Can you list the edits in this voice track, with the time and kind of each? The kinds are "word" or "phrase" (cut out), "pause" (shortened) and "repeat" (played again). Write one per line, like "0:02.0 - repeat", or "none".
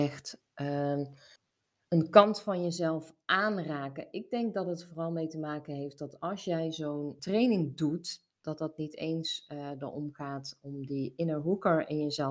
0:01.4 - pause
0:07.2 - word
0:08.3 - pause